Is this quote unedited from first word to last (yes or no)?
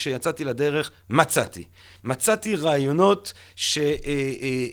yes